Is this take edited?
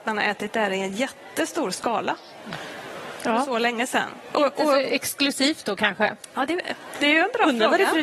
no; 0 cuts

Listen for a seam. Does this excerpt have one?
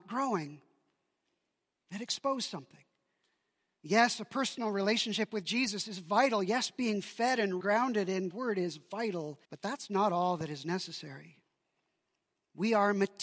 yes; 3 cuts; at 7.6 s, 8.3 s, 9.4 s

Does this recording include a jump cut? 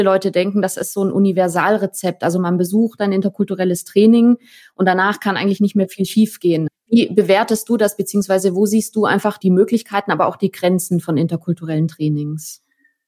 no; 0 cuts

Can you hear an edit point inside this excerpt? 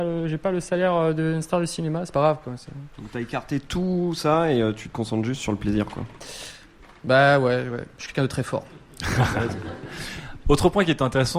no; 0 cuts

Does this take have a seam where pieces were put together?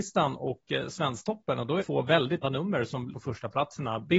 yes; 3 cuts; at 1.8 s, 2.4 s, 3.1 s

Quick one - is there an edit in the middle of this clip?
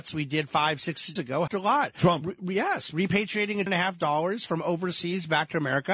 yes; 3 cuts; at 1.2 s, 1.5 s, 3.7 s

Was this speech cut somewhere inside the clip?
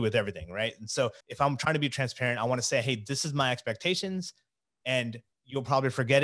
yes; 1 cut; at 1.2 s

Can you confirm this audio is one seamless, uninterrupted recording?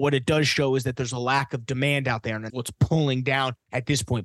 no; 1 cut; at 2.5 s

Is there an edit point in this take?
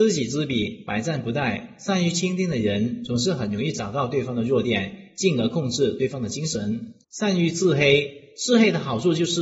yes; 1 cut; at 7.0 s

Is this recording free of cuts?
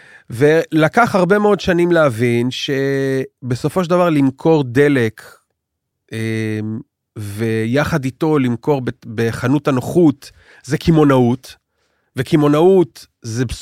yes; 0 cuts

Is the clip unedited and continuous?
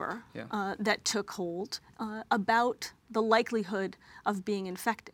yes; 0 cuts

